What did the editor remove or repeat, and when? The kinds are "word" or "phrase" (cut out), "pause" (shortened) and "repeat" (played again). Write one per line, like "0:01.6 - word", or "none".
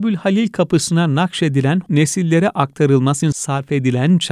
0:01.9 - word
0:03.2 - word